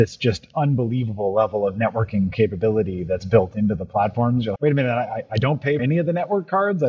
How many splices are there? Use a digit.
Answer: 2